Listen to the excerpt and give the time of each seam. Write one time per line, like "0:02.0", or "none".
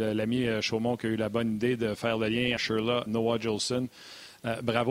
0:02.6
0:03.1